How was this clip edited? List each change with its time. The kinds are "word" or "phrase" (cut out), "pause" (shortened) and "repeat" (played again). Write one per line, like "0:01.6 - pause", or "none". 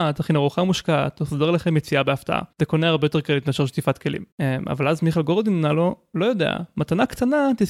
0:02.5 - pause
0:04.3 - pause